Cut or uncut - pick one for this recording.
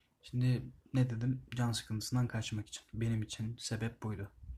uncut